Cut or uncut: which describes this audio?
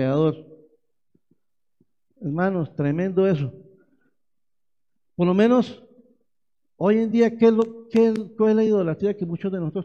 uncut